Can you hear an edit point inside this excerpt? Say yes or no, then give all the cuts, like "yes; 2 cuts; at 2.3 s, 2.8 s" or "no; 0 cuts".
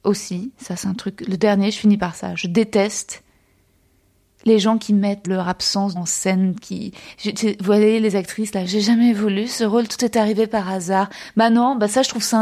yes; 2 cuts; at 5.2 s, 6.0 s